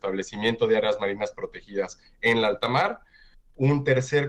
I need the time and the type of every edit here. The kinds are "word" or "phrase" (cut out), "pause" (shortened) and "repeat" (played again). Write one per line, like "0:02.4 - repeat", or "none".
none